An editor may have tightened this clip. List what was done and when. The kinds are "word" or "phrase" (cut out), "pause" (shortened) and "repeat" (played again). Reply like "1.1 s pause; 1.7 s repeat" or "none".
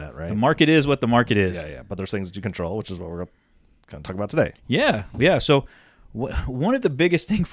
2.4 s word